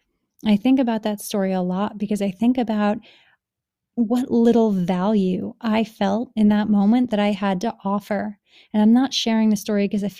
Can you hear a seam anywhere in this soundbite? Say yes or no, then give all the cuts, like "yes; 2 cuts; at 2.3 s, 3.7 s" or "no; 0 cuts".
no; 0 cuts